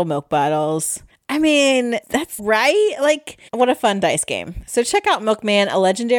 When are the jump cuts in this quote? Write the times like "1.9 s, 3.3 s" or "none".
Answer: 1.1 s, 2.0 s, 2.4 s, 3.5 s